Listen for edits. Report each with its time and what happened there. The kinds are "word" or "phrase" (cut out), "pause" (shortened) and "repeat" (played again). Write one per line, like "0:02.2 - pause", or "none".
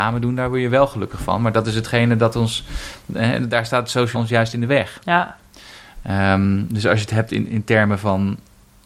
0:04.1 - word
0:07.5 - word